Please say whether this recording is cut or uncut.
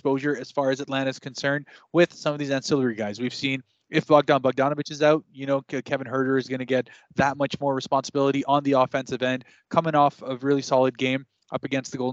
uncut